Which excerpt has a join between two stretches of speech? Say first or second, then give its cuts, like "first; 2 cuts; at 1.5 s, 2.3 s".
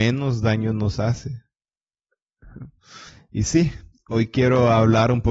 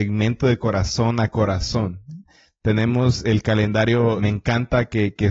second; 1 cut; at 4.2 s